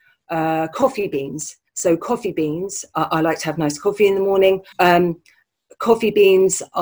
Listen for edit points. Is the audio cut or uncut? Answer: cut